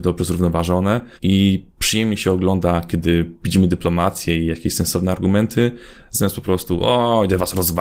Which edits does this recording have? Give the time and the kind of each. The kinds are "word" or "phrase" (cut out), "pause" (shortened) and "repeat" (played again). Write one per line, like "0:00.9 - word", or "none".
0:01.2 - pause